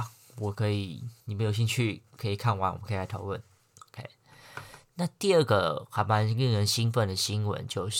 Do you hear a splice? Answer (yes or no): yes